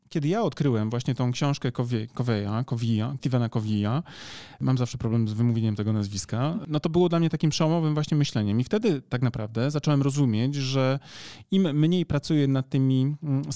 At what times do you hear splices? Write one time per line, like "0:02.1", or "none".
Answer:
none